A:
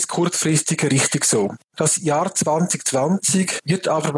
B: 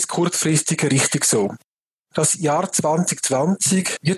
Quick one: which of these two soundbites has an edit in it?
A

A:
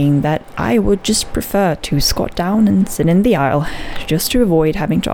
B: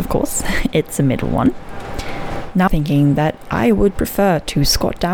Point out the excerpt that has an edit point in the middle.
B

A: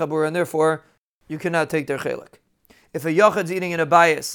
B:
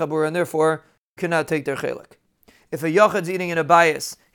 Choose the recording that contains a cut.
B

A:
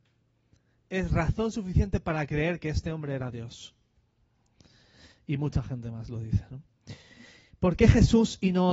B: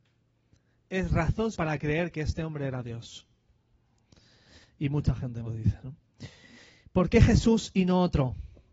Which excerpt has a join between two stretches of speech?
B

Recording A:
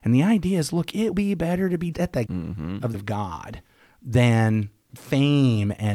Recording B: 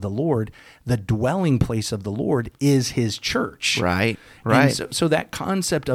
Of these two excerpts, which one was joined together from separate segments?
A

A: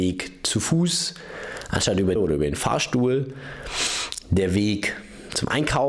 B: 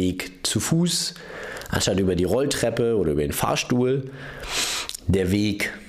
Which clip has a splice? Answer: A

